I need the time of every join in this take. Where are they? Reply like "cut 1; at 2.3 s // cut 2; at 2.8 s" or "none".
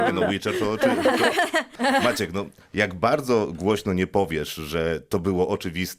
none